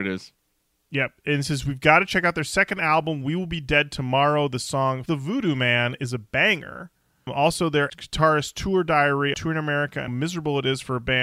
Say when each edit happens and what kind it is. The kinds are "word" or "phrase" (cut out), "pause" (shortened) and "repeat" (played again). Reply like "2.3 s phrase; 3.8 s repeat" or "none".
5.1 s word; 7.9 s word; 9.3 s word; 10.1 s word

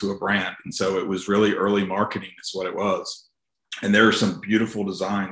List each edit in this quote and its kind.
none

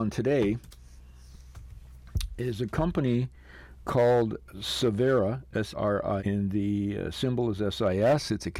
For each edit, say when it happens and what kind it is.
4.5 s word; 5.7 s phrase; 6.2 s word

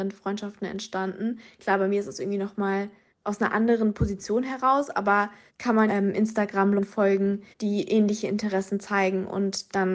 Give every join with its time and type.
3.1 s pause; 5.5 s word; 5.9 s phrase; 6.8 s word; 7.5 s pause

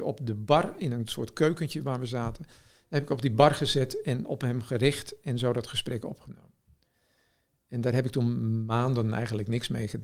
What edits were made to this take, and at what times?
none

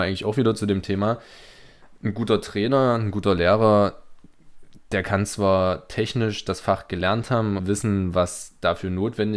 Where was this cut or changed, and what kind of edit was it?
7.6 s word

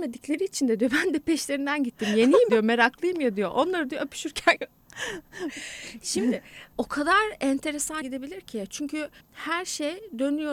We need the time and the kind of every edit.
2.5 s word; 4.6 s word; 6.7 s word; 8.0 s word; 9.2 s word

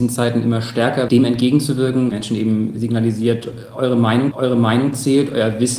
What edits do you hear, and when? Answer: 1.1 s word; 2.1 s phrase; 4.3 s repeat

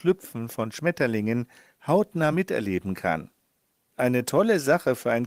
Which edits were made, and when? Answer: none

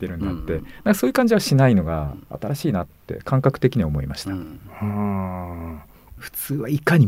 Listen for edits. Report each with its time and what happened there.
none

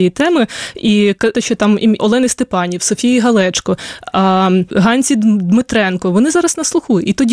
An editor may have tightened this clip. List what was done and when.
1.3 s word; 2.0 s word; 4.7 s word

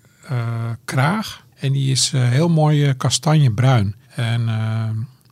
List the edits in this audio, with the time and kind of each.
1.5 s pause; 4.0 s pause

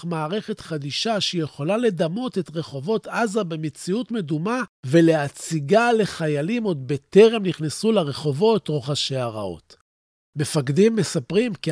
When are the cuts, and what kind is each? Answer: none

